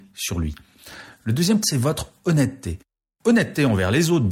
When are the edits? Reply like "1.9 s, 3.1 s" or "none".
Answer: 1.6 s